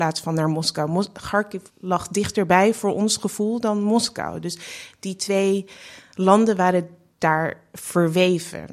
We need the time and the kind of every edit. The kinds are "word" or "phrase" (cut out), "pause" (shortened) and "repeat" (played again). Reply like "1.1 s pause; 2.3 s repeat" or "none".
1.7 s pause